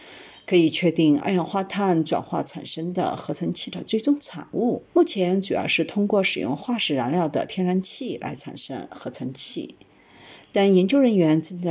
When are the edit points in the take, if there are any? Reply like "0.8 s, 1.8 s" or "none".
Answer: 4.9 s